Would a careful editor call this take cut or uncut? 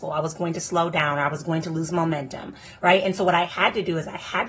uncut